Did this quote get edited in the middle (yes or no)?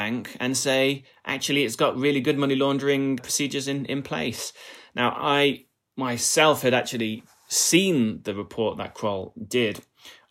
no